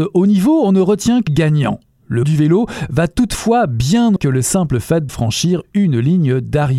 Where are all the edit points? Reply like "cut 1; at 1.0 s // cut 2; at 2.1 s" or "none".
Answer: cut 1; at 1.3 s // cut 2; at 2.2 s // cut 3; at 4.2 s // cut 4; at 5.1 s

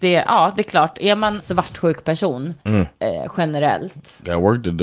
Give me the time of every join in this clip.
cut 1; at 1.4 s // cut 2; at 2.6 s

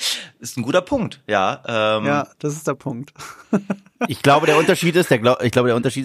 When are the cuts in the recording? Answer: none

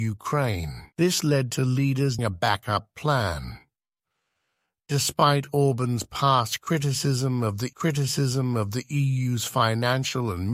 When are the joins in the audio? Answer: cut 1; at 0.9 s // cut 2; at 2.2 s // cut 3; at 7.7 s

